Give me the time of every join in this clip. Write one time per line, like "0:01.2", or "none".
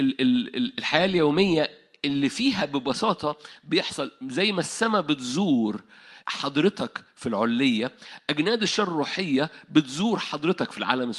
0:06.2

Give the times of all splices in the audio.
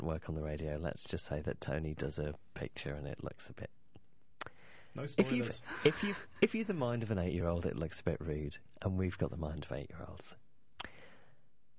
none

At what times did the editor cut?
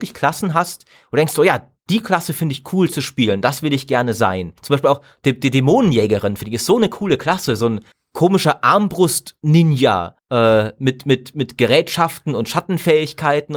0:04.6
0:07.9
0:10.2

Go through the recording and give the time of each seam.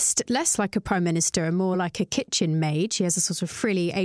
none

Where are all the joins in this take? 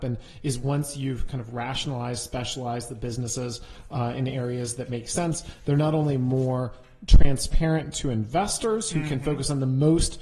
none

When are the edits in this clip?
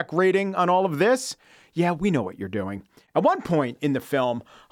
none

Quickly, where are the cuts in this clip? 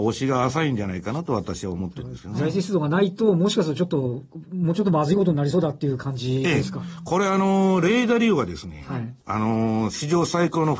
0:09.2

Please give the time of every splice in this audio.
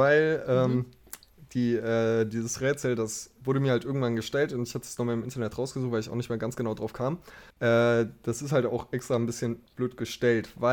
0:07.5
0:09.7

